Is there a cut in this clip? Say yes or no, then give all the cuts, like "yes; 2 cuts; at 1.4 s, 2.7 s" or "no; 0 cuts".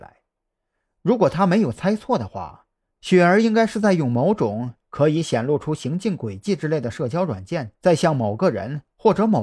yes; 1 cut; at 7.7 s